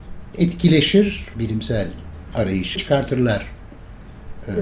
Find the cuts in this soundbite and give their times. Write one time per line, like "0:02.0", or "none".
0:01.3
0:02.8